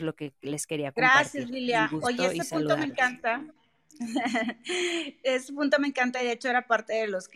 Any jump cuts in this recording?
no; 0 cuts

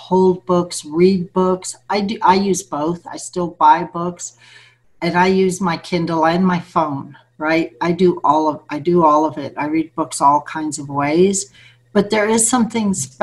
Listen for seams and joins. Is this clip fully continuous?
yes; 0 cuts

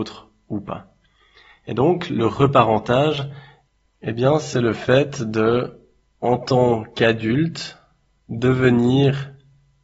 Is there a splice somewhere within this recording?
no; 0 cuts

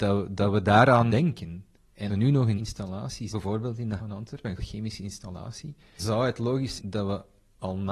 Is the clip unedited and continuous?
no; 8 cuts; at 1.1 s, 2.1 s, 2.6 s, 3.3 s, 4.0 s, 4.6 s, 6.0 s, 6.8 s

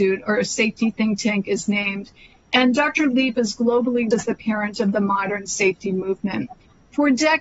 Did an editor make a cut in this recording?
yes; 1 cut; at 4.1 s

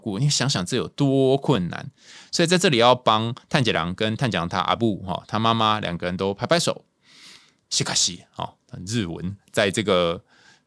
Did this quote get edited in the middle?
no; 0 cuts

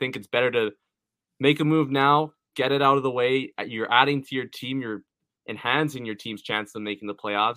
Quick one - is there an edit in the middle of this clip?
no; 0 cuts

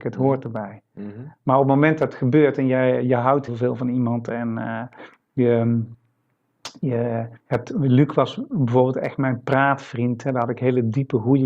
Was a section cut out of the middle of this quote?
yes; 2 cuts; at 3.5 s, 7.4 s

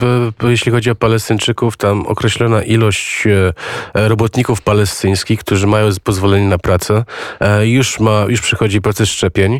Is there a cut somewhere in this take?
no; 0 cuts

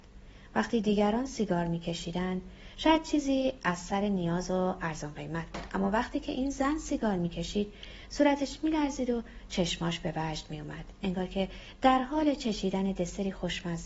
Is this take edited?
no; 0 cuts

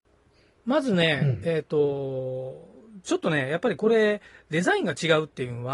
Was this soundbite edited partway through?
no; 0 cuts

